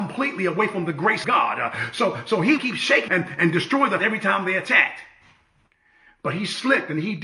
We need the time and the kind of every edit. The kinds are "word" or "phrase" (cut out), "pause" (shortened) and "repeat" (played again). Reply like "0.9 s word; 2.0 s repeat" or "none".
1.2 s phrase; 2.6 s phrase; 3.1 s word; 4.0 s word